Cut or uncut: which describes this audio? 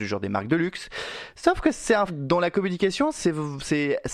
cut